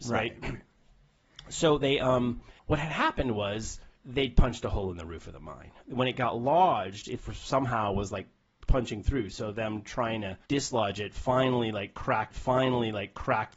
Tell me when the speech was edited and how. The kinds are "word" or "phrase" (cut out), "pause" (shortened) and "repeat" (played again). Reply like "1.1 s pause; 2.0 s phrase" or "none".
2.6 s pause; 3.9 s pause; 7.2 s word; 8.7 s word; 10.4 s pause; 12.3 s repeat